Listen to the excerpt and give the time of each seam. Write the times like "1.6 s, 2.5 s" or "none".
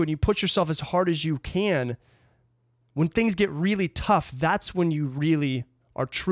none